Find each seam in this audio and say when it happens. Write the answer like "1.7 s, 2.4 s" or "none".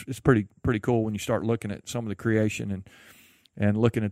none